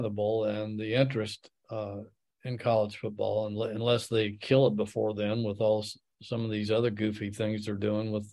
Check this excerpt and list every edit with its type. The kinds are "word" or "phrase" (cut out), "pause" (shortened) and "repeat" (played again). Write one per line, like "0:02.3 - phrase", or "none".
none